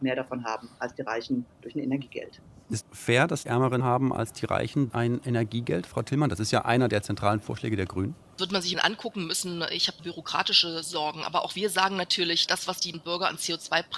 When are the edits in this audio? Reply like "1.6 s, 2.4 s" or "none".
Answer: 2.8 s, 3.5 s, 3.8 s, 4.9 s, 8.4 s, 8.7 s, 10.0 s, 12.5 s, 12.9 s